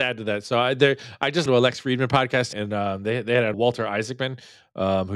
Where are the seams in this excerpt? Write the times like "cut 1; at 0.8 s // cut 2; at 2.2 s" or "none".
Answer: cut 1; at 1.5 s // cut 2; at 2.5 s // cut 3; at 3.5 s